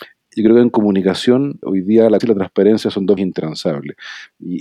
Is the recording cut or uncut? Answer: cut